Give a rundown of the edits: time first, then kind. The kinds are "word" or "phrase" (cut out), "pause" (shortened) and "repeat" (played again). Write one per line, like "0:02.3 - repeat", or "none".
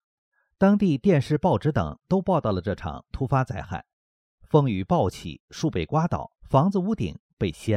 0:06.3 - pause